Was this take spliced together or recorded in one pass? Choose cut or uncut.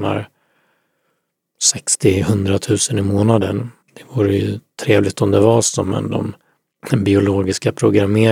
cut